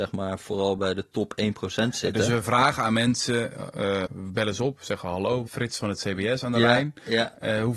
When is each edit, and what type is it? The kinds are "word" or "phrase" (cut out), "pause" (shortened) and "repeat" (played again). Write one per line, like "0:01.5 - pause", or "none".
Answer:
0:04.1 - word
0:05.5 - word